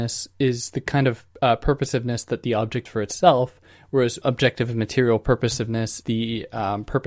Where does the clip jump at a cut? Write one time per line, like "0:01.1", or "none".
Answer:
0:01.3
0:02.9
0:04.2
0:06.0